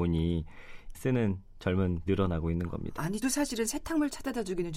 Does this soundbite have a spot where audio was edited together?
yes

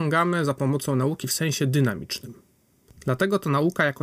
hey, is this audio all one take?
yes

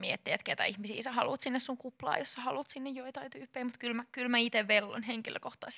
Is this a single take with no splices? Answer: yes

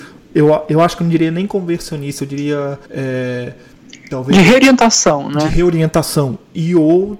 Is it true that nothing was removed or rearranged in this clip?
no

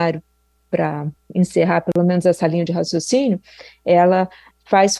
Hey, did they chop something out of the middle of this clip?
no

